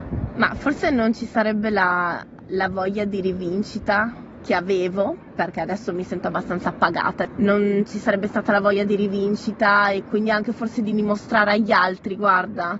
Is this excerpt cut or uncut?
uncut